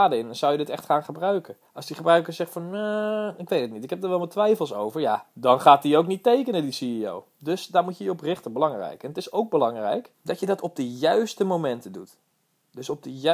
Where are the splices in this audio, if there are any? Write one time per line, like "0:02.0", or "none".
0:01.6
0:10.1